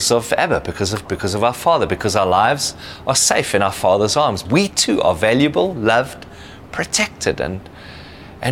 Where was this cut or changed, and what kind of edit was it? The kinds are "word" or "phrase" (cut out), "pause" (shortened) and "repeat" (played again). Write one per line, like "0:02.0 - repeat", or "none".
0:01.1 - word
0:04.5 - word